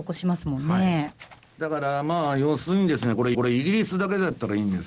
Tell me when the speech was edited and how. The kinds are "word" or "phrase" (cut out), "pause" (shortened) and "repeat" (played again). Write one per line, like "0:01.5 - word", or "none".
0:01.5 - pause
0:03.3 - repeat